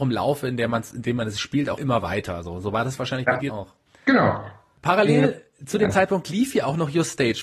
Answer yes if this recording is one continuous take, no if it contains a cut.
no